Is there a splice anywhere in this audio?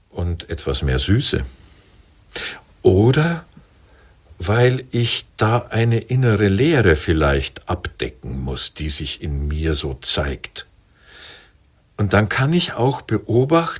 no; 0 cuts

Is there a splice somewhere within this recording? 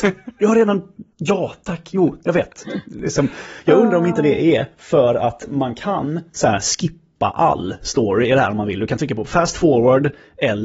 yes; 1 cut; at 1.1 s

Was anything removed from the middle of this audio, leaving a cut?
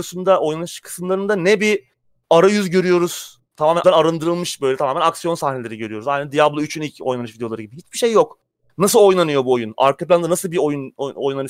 yes; 1 cut; at 3.8 s

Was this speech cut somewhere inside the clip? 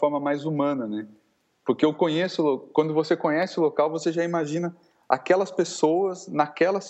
no; 0 cuts

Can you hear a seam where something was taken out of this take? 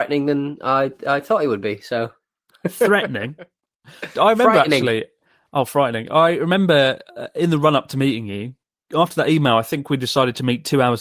no; 0 cuts

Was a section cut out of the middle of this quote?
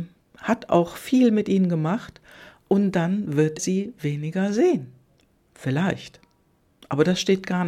yes; 2 cuts; at 3.6 s, 5.2 s

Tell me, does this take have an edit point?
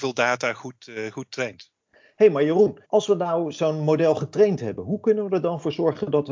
yes; 2 cuts; at 1.8 s, 2.8 s

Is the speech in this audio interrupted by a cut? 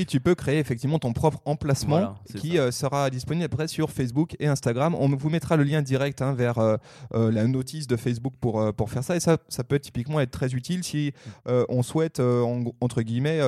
no; 0 cuts

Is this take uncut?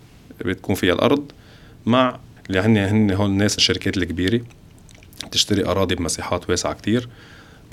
no; 2 cuts; at 2.4 s, 3.6 s

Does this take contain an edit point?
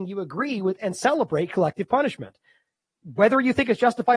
no; 0 cuts

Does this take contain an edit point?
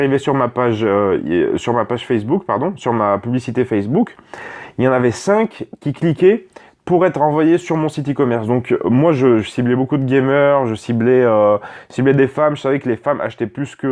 no; 0 cuts

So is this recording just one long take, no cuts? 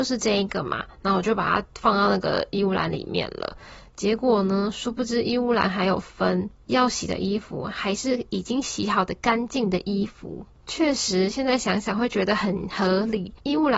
no; 1 cut; at 3.9 s

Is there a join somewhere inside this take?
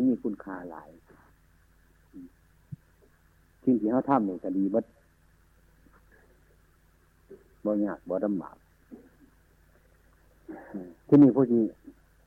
no; 0 cuts

